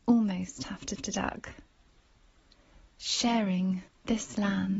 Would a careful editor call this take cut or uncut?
cut